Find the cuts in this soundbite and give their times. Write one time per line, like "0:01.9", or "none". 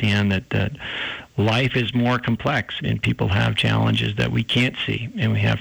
0:02.8